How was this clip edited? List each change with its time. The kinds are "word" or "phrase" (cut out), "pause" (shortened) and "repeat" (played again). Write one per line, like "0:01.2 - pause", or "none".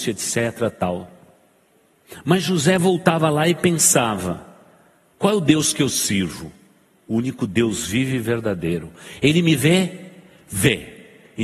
none